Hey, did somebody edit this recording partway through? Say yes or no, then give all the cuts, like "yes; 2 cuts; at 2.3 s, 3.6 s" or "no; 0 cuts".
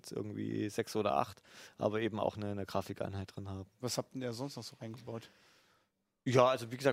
no; 0 cuts